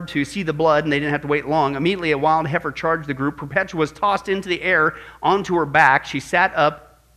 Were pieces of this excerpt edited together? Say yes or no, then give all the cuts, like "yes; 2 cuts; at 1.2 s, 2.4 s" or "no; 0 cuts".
no; 0 cuts